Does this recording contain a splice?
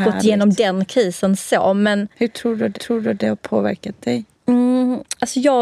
yes; 3 cuts; at 2.1 s, 2.7 s, 4.3 s

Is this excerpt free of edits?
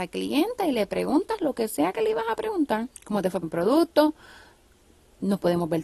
no; 2 cuts; at 3.0 s, 3.4 s

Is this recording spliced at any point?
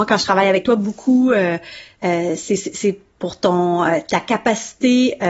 no; 0 cuts

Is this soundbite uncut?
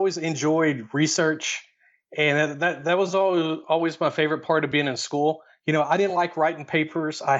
yes; 0 cuts

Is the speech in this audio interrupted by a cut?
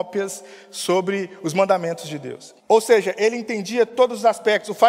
yes; 1 cut; at 2.6 s

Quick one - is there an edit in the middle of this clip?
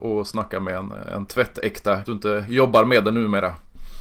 yes; 1 cut; at 2.0 s

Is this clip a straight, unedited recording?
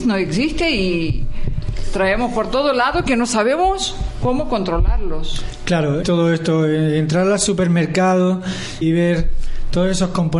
no; 2 cuts; at 6.0 s, 8.8 s

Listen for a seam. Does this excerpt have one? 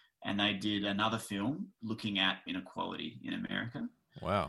yes; 2 cuts; at 1.8 s, 2.5 s

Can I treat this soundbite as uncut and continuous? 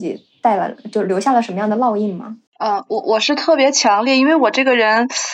no; 1 cut; at 2.5 s

